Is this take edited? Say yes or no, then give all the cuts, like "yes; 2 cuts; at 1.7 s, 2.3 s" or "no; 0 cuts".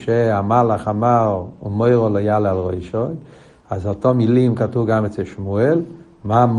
no; 0 cuts